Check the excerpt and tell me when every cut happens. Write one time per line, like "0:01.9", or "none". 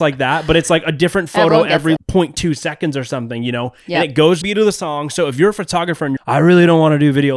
0:02.0
0:04.4
0:06.2